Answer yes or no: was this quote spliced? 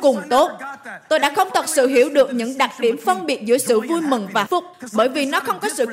yes